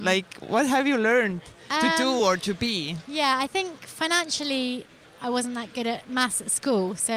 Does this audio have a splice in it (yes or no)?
no